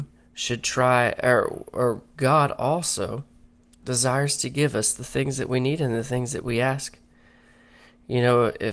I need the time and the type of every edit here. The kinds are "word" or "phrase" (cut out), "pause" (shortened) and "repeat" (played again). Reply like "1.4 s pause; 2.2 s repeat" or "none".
none